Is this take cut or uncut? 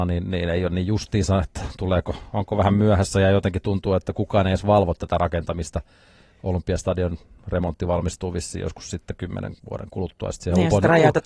uncut